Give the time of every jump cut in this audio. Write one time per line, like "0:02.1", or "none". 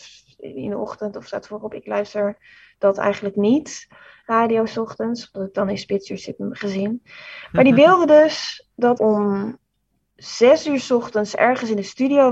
0:09.0